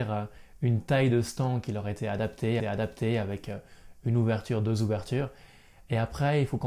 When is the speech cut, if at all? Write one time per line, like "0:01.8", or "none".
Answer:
0:02.6